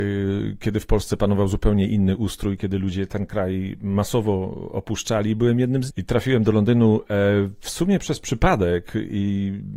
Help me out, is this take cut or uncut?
cut